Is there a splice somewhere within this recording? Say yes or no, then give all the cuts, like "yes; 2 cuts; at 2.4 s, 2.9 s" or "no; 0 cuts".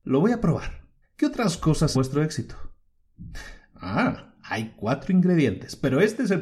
yes; 2 cuts; at 1.0 s, 1.9 s